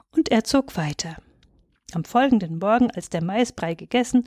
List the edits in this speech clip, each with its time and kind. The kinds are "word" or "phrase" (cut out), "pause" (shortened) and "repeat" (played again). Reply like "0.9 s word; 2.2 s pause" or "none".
none